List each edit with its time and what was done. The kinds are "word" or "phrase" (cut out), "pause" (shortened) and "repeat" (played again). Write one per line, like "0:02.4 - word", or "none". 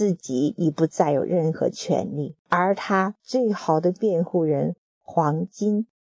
0:02.4 - pause